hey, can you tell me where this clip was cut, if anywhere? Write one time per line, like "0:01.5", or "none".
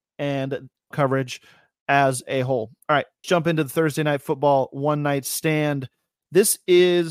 0:00.9
0:03.2